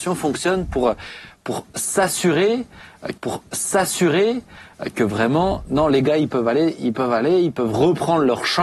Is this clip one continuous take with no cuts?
no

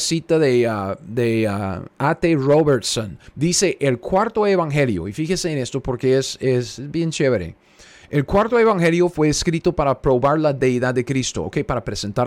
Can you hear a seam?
yes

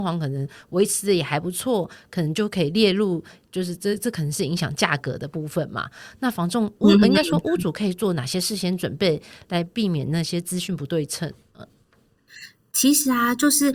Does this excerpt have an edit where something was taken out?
no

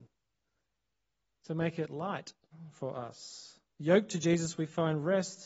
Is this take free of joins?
no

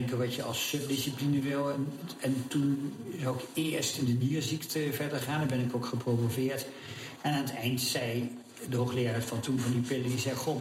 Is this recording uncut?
yes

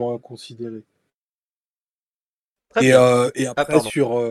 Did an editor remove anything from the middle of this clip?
no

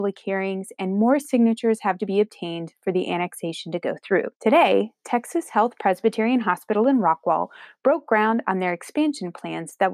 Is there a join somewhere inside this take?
yes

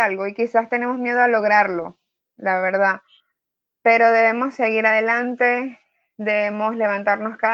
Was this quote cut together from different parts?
no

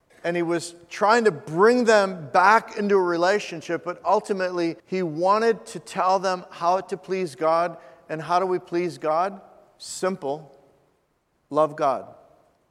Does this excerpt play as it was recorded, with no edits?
no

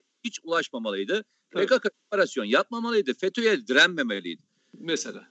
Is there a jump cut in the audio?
no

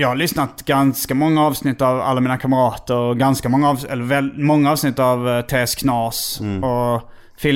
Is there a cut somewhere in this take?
no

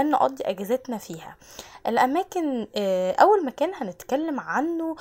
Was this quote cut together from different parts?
no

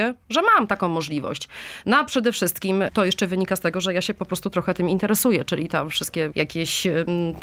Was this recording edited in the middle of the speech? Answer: yes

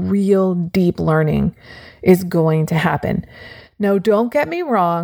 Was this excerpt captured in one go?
yes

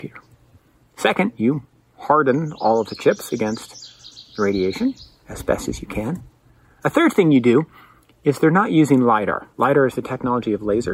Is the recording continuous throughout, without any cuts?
yes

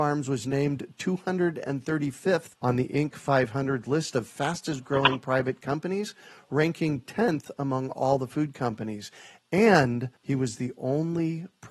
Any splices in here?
yes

